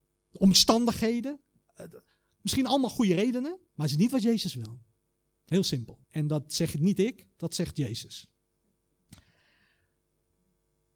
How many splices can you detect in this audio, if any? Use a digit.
2